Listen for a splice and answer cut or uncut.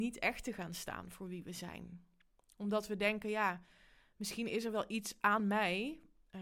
uncut